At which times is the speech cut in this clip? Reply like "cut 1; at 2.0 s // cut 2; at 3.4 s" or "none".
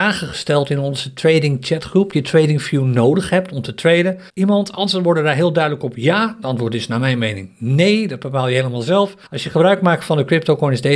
cut 1; at 2.1 s // cut 2; at 4.3 s // cut 3; at 6.4 s // cut 4; at 9.3 s